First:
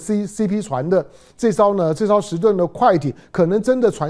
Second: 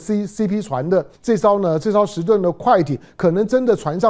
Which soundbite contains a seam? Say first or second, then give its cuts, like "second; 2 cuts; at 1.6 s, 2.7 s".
second; 1 cut; at 1.1 s